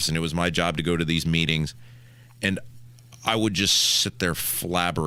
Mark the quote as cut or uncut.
uncut